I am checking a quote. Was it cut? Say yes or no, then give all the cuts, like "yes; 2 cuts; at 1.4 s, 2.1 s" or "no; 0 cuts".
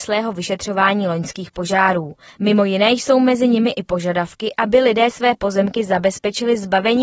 no; 0 cuts